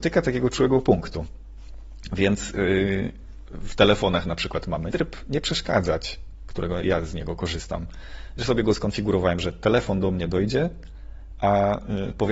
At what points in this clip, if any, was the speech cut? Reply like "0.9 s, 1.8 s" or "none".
4.9 s, 6.8 s